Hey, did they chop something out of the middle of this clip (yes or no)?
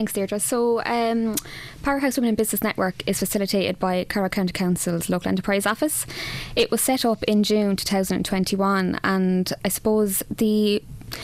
no